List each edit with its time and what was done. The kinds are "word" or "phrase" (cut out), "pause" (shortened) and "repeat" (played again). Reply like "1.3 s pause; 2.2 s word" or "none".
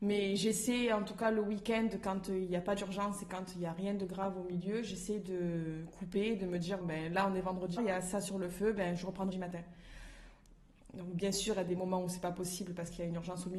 6.8 s word; 7.8 s word; 9.3 s word